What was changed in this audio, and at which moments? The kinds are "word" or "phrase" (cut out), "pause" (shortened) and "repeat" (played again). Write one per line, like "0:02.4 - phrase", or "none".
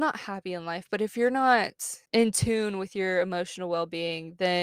0:02.1 - pause

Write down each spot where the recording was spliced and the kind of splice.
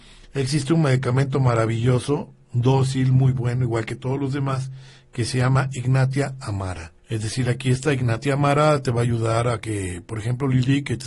0:07.0 - pause

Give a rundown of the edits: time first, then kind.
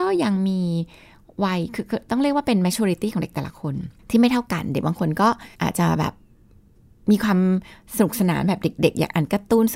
0:04.0 - pause
0:05.5 - pause

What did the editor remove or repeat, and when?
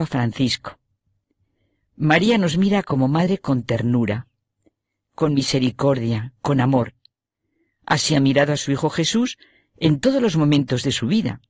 none

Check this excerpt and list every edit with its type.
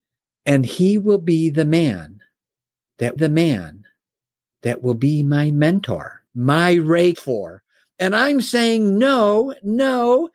0:03.2 - repeat
0:06.3 - pause
0:07.1 - phrase

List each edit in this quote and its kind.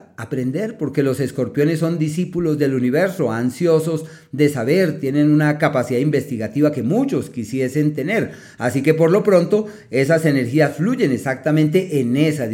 none

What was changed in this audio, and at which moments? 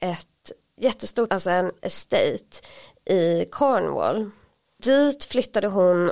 0:01.3 - word

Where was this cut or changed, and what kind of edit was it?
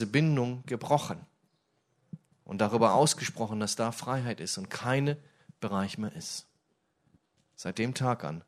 0:02.3 - pause

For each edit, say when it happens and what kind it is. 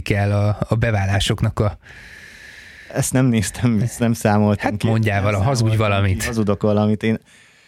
none

